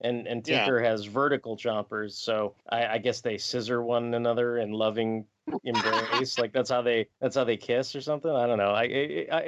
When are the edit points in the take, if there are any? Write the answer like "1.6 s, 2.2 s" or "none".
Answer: 2.6 s, 7.1 s